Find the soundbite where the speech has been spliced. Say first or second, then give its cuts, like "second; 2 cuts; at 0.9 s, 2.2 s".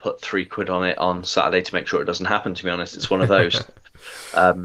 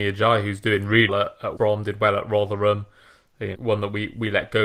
second; 3 cuts; at 1.1 s, 1.6 s, 3.5 s